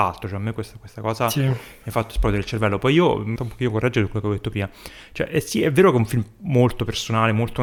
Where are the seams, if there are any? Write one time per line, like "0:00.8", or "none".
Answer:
0:03.4